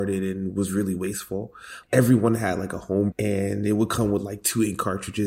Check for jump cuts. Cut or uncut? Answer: cut